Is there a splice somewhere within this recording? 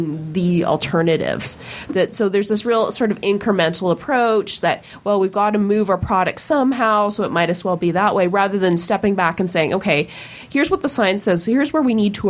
no; 0 cuts

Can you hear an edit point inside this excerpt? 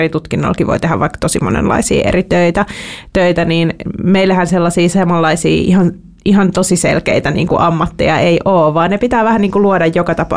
no; 0 cuts

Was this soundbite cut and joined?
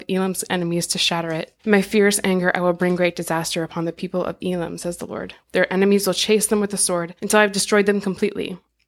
yes; 3 cuts; at 1.6 s, 5.4 s, 7.2 s

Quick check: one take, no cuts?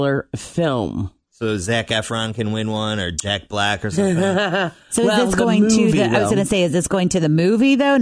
yes; 0 cuts

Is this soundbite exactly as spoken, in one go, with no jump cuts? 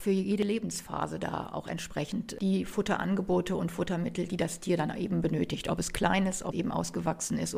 no; 1 cut; at 6.5 s

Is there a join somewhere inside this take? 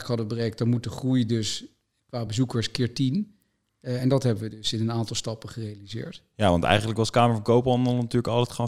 no; 0 cuts

